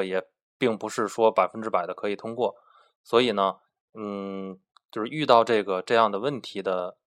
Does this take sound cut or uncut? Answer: uncut